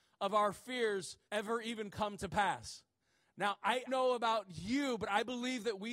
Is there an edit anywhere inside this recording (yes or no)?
yes